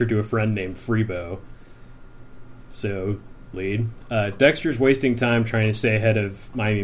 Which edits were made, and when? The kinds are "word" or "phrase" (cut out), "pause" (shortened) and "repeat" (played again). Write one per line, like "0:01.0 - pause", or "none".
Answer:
0:03.5 - phrase